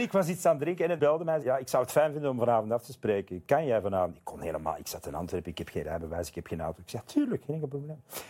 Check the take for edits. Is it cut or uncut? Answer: cut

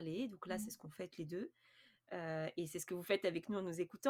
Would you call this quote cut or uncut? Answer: cut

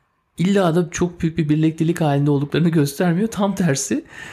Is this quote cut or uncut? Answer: uncut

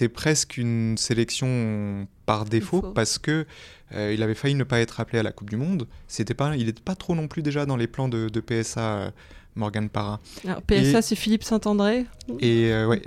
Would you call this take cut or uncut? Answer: uncut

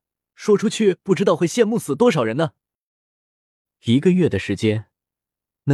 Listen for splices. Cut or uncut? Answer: uncut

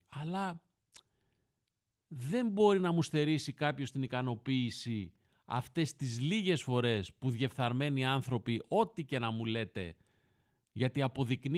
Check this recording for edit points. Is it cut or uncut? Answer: uncut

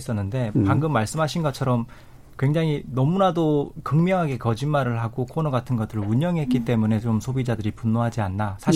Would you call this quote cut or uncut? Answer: uncut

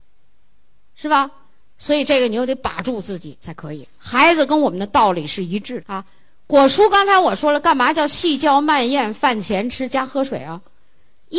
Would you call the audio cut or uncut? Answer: cut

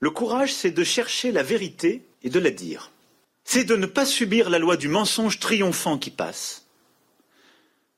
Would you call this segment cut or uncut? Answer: cut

